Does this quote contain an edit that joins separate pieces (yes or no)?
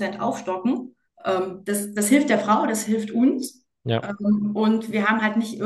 yes